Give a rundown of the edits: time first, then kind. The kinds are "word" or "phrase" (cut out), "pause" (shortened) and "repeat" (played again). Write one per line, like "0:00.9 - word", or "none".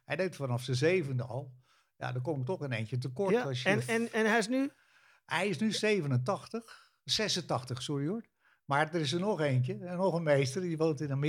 none